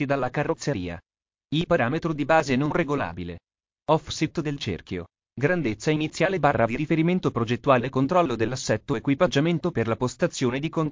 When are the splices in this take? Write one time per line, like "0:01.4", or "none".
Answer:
none